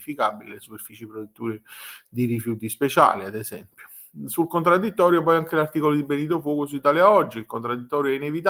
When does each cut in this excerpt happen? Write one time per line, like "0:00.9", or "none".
none